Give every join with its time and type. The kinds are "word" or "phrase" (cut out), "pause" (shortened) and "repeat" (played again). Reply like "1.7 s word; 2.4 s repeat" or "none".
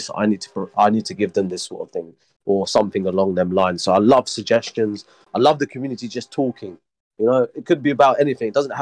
none